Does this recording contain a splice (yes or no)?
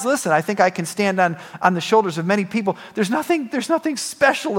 no